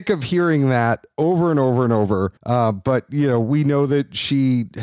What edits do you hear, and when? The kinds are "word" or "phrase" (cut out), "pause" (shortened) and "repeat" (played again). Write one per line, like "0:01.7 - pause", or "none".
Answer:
0:02.4 - pause